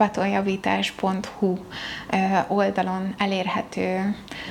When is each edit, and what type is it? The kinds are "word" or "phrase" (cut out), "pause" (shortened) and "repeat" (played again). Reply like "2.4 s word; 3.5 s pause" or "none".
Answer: none